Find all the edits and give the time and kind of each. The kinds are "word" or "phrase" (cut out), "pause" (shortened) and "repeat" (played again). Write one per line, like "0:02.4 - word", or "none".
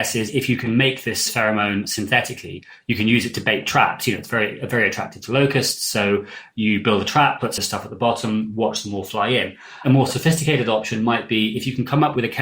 0:07.6 - word